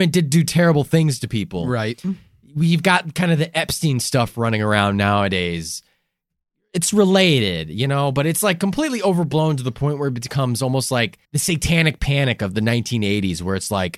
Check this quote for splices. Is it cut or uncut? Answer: cut